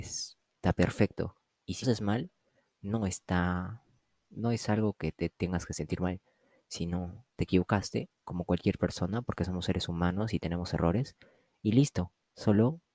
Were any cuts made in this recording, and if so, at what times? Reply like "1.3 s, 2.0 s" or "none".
1.8 s